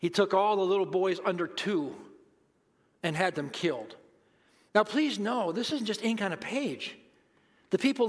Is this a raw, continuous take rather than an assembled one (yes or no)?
yes